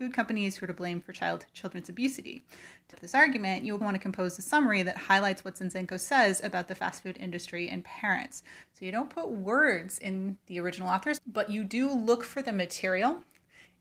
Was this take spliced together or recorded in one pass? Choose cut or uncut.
cut